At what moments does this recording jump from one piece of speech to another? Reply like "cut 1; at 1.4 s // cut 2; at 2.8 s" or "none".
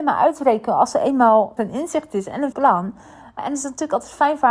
cut 1; at 1.6 s // cut 2; at 2.5 s // cut 3; at 3.4 s